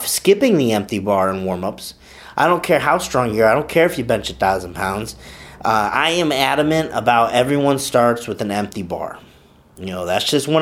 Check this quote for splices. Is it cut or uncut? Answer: uncut